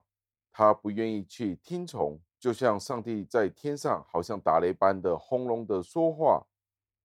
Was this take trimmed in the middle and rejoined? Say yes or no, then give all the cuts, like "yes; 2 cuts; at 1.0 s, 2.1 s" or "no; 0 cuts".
yes; 1 cut; at 2.3 s